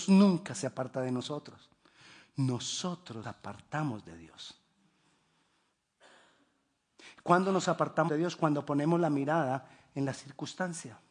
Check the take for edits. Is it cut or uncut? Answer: cut